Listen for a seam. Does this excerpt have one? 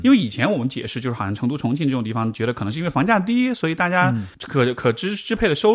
yes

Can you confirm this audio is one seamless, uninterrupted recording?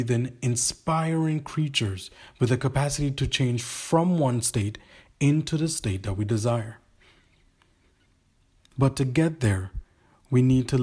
yes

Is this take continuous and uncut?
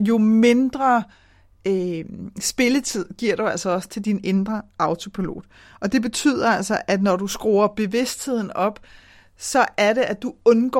yes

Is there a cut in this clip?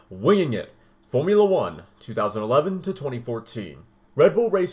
no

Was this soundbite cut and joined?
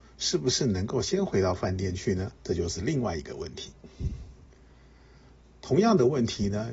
yes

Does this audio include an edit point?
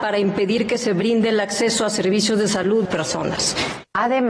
yes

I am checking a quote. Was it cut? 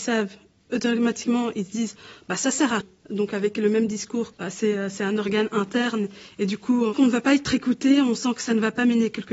yes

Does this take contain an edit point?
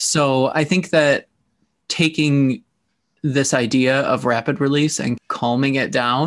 no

